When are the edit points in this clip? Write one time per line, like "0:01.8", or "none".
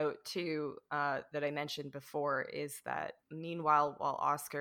0:03.2